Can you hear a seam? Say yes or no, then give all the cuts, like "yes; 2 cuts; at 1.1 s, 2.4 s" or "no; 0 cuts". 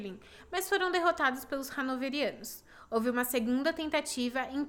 no; 0 cuts